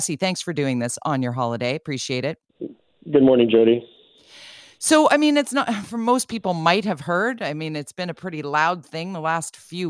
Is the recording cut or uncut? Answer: uncut